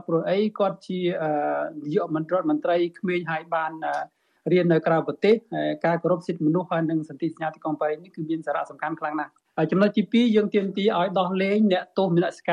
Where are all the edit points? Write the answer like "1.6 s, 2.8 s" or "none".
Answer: none